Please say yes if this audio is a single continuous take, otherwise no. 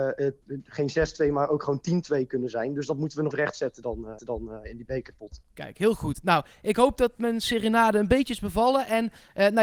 no